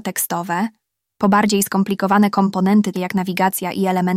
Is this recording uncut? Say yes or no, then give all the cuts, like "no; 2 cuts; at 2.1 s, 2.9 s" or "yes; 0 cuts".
no; 1 cut; at 2.9 s